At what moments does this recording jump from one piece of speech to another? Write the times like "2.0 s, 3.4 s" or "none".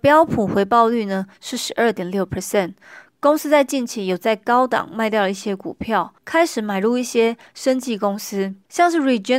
6.2 s